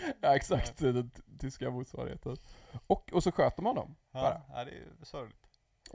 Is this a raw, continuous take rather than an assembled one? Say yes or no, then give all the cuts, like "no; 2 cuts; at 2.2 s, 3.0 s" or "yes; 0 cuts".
no; 1 cut; at 4.0 s